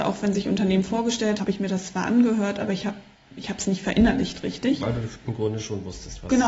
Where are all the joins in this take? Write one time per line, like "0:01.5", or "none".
0:01.4